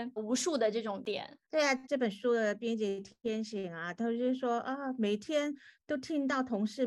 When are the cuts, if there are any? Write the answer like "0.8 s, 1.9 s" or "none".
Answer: none